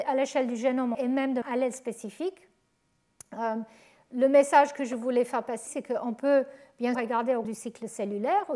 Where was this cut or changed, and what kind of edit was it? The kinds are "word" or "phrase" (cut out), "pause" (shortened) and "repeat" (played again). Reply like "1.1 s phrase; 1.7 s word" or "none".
0.9 s word; 1.4 s word; 5.7 s word; 6.9 s word; 7.4 s word